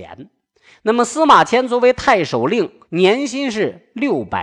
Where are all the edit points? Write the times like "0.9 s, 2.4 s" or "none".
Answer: 2.8 s